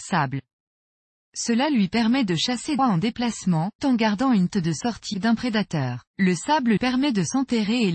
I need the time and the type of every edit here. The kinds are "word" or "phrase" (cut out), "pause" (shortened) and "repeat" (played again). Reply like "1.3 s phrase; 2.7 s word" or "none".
2.8 s phrase; 3.8 s word; 4.5 s word; 5.1 s phrase; 6.1 s pause; 6.8 s word